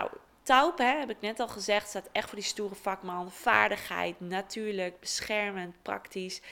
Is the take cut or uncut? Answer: uncut